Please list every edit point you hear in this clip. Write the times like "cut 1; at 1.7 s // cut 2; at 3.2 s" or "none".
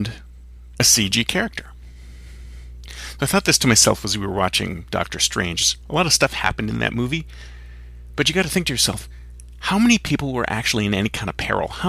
none